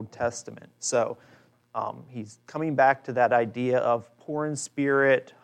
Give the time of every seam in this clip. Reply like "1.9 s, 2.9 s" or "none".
2.5 s